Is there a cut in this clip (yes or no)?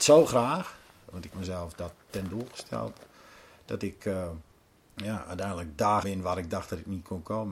yes